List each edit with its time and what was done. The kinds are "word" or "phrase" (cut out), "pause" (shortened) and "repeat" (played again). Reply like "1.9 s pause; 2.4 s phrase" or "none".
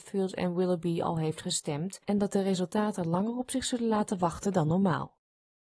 2.0 s pause